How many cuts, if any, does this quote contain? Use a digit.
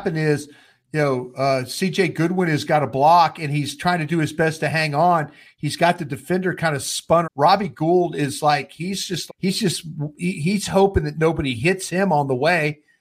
2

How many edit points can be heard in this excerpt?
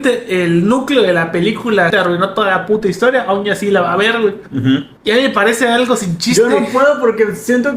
2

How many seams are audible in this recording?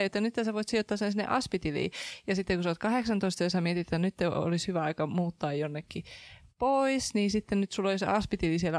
0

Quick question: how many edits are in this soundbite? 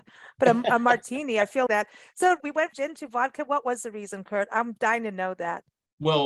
3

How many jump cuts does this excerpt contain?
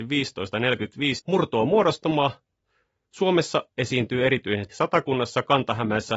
3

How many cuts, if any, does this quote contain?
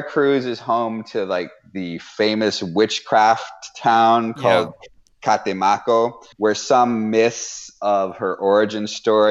1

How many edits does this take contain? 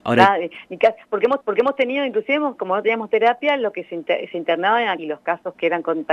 2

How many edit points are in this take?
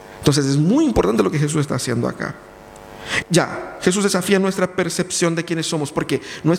1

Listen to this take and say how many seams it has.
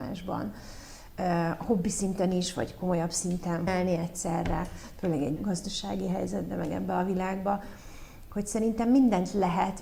2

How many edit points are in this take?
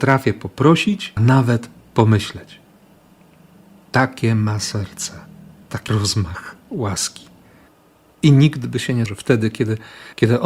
3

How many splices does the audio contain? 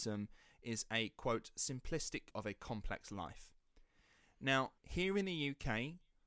2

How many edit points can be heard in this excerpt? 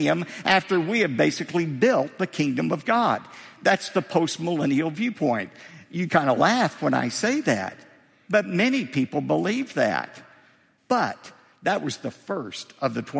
0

